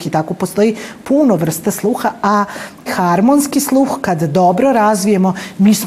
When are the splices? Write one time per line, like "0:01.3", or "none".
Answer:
0:02.9